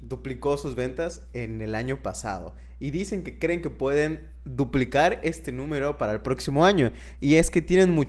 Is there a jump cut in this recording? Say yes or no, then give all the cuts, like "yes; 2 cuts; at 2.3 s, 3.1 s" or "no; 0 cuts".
no; 0 cuts